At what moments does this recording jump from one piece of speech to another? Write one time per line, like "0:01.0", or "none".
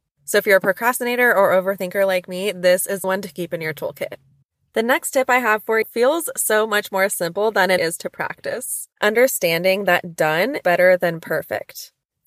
0:03.0
0:05.8
0:07.8
0:10.6